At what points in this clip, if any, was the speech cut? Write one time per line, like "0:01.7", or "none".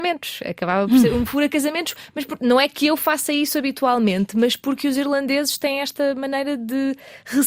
none